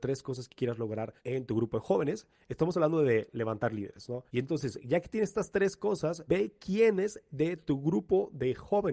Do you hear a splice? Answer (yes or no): yes